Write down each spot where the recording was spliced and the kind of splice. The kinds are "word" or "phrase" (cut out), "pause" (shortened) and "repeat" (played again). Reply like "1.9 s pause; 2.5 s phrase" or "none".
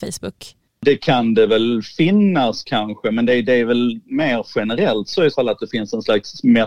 5.3 s word